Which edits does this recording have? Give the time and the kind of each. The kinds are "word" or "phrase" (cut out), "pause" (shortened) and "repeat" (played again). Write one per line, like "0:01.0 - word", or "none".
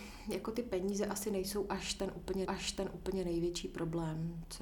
0:02.5 - repeat